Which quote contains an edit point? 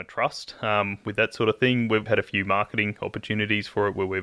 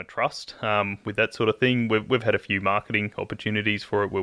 first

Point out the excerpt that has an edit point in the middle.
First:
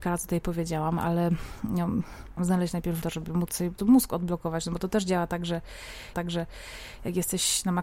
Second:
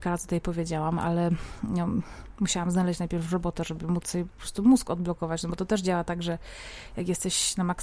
first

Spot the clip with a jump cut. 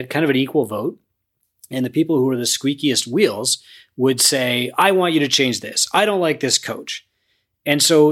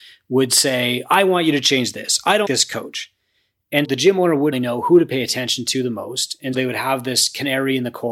second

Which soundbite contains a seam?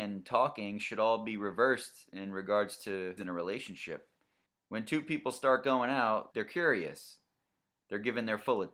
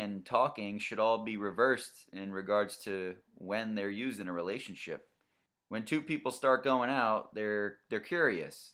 first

